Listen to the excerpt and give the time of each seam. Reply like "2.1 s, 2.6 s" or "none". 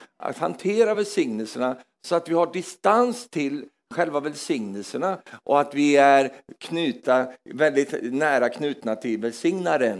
none